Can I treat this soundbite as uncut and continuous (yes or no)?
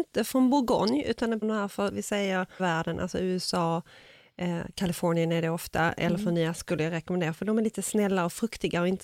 no